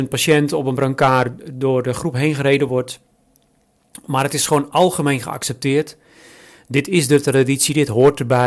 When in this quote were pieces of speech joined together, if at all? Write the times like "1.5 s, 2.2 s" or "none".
none